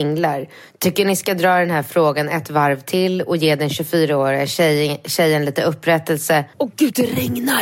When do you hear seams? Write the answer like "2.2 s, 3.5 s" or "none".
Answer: 6.5 s